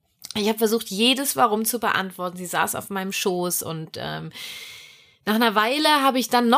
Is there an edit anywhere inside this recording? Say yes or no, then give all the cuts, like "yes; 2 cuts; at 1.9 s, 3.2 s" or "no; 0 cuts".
no; 0 cuts